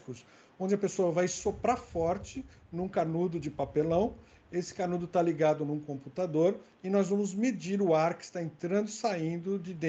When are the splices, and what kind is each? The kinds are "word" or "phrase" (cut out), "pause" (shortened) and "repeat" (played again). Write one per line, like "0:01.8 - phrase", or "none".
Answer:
none